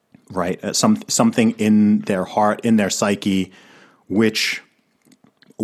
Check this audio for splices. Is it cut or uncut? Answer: uncut